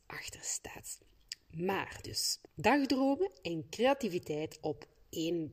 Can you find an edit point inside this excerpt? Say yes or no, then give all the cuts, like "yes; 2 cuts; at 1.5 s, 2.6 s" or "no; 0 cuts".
yes; 2 cuts; at 2.5 s, 4.6 s